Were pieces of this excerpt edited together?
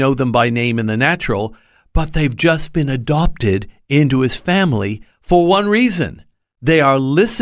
no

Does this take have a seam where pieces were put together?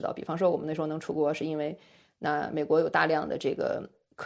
no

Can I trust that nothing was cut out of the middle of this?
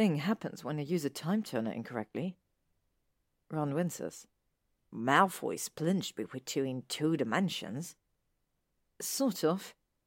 yes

